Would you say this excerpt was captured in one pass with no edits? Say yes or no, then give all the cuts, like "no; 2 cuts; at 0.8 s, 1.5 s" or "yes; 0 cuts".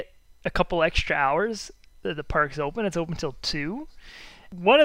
yes; 0 cuts